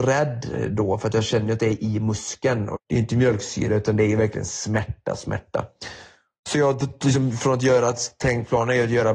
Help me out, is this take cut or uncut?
cut